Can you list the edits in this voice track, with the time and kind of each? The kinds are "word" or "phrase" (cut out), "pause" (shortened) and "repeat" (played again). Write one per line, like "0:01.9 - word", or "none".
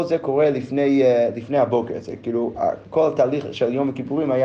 none